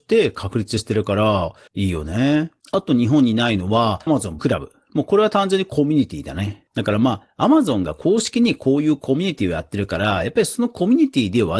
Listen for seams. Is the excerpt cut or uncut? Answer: cut